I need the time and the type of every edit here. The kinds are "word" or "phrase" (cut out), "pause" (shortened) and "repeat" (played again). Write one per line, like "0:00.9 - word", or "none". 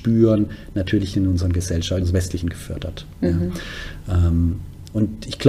0:01.1 - word
0:02.0 - word
0:02.4 - word